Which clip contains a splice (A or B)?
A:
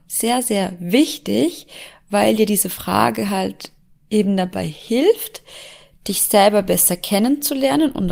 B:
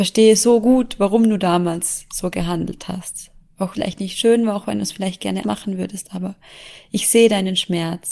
B